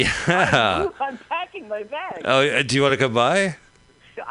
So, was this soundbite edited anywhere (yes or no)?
no